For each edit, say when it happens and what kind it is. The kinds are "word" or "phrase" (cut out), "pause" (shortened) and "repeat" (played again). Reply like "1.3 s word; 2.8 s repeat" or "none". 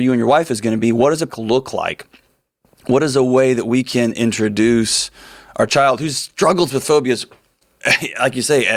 1.3 s phrase